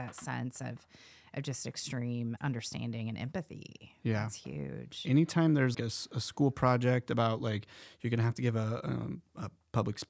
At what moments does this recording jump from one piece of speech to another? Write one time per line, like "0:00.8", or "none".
0:02.4
0:05.7